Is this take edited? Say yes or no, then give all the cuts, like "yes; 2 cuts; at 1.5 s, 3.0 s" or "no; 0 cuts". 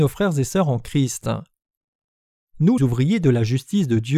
yes; 1 cut; at 2.8 s